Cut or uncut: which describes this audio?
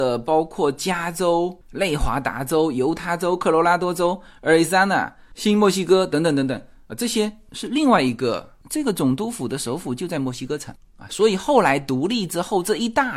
uncut